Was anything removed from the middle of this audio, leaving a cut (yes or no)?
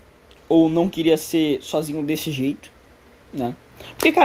no